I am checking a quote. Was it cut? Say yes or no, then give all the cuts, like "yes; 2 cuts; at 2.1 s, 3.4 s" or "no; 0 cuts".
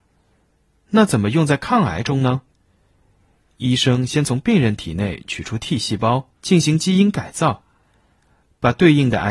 yes; 1 cut; at 6.3 s